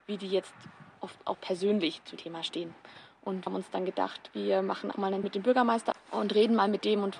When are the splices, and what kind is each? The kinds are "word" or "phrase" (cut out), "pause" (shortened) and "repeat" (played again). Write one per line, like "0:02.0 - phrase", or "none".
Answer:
0:01.3 - word
0:02.2 - word
0:03.5 - word
0:04.9 - word
0:05.2 - word
0:05.9 - word